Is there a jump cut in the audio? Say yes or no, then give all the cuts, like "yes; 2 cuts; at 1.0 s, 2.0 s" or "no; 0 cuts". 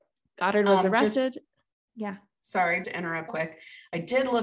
yes; 2 cuts; at 2.8 s, 3.3 s